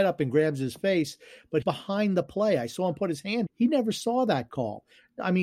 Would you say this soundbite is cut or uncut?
cut